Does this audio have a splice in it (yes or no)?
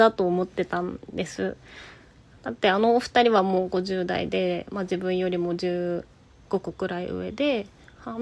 no